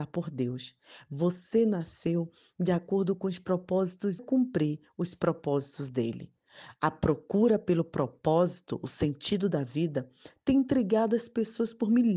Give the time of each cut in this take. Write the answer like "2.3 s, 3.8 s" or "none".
4.2 s